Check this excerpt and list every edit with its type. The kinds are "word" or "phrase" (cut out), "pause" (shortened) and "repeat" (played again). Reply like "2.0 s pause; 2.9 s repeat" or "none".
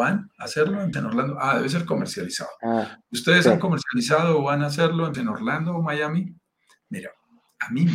0.9 s word; 5.1 s word